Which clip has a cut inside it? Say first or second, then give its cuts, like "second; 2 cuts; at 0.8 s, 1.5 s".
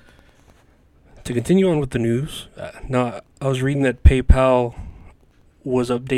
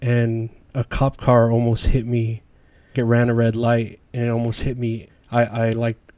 second; 2 cuts; at 2.9 s, 5.1 s